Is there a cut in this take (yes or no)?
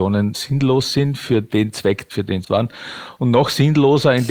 yes